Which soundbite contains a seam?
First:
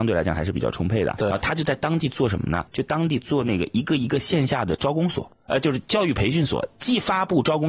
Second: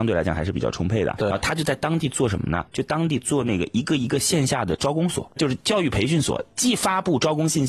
second; 1 cut; at 5.4 s

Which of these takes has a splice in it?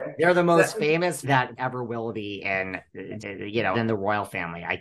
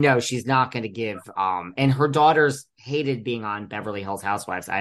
first; 4 cuts; at 1.2 s, 1.6 s, 3.2 s, 3.7 s

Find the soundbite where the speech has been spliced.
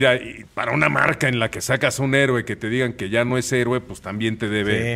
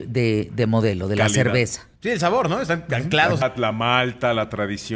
second; 2 cuts; at 2.0 s, 3.4 s

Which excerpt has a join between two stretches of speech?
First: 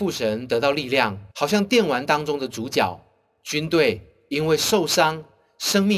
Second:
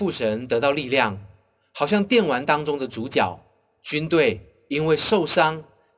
first; 1 cut; at 1.3 s

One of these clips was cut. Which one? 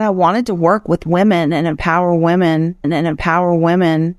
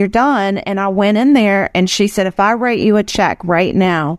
first; 1 cut; at 2.8 s

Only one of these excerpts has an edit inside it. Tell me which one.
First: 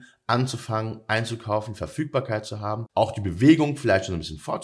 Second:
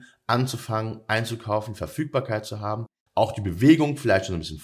first; 1 cut; at 2.9 s

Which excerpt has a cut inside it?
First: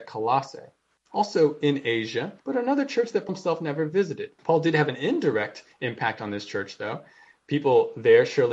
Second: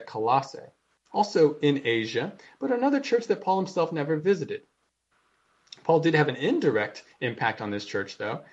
first; 3 cuts; at 2.4 s, 3.3 s, 4.4 s

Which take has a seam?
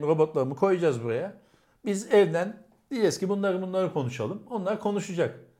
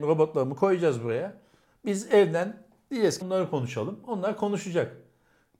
second; 1 cut; at 3.2 s

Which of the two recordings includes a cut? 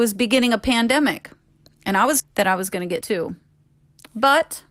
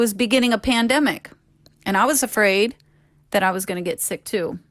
first; 2 cuts; at 2.2 s, 3.0 s

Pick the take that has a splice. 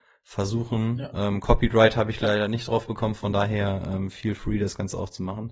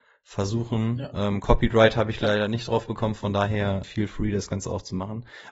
second; 1 cut; at 3.8 s

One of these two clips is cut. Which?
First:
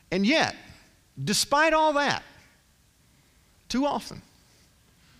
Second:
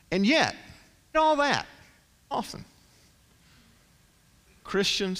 second; 2 cuts; at 1.1 s, 2.3 s

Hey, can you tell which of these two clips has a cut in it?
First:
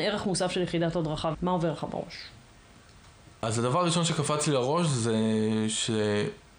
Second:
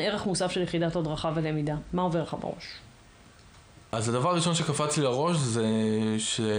first; 1 cut; at 1.3 s

